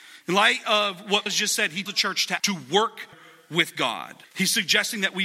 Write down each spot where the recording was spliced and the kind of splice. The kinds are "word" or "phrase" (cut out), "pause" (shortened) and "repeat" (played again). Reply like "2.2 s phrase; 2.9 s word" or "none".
1.3 s word; 1.9 s word; 2.4 s word; 3.1 s word; 4.2 s pause

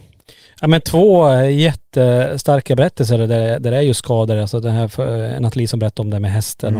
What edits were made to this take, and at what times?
none

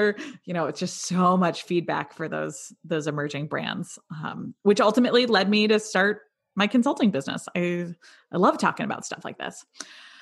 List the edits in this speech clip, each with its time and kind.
none

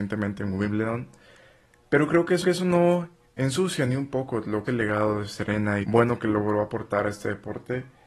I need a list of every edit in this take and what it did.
2.4 s repeat; 4.7 s phrase; 5.8 s phrase

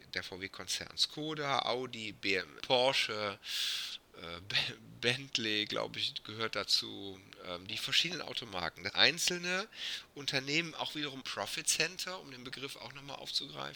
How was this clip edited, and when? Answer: 2.6 s word; 8.9 s phrase; 10.7 s phrase; 11.2 s word

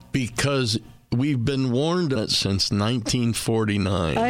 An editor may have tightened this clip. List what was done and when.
2.1 s word

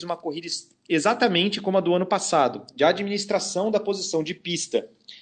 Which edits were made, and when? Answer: none

